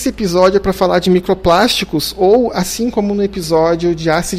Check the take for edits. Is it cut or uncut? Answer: uncut